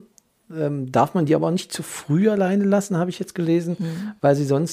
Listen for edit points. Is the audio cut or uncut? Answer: uncut